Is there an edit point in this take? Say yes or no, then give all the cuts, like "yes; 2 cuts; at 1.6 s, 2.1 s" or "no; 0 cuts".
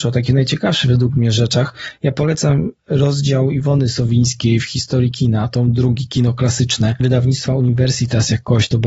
no; 0 cuts